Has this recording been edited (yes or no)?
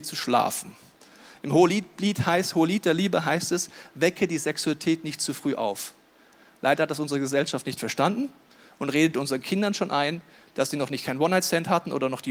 no